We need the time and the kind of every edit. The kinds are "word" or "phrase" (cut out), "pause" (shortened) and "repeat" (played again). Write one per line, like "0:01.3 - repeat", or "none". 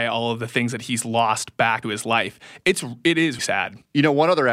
0:01.8 - word
0:03.4 - word